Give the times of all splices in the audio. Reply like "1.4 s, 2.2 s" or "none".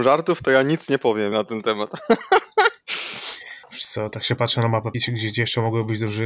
1.3 s, 3.6 s, 4.9 s

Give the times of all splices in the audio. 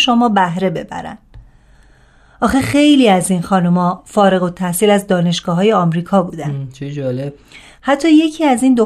none

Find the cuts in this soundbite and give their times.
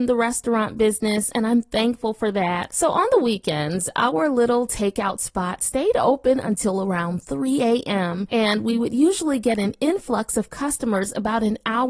none

